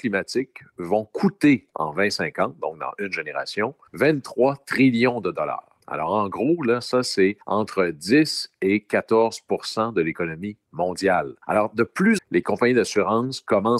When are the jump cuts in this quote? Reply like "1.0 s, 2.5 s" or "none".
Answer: 1.7 s, 3.9 s, 5.8 s, 7.4 s, 11.4 s, 12.2 s